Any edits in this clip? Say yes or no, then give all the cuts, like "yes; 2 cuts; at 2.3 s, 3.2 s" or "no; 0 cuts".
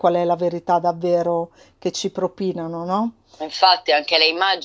no; 0 cuts